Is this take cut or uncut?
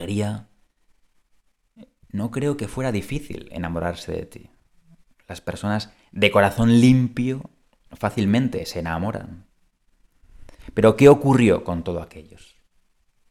uncut